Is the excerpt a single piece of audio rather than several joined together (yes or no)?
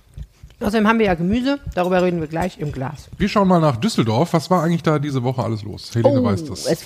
yes